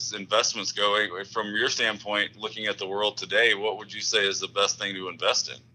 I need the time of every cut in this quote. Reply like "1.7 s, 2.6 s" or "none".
none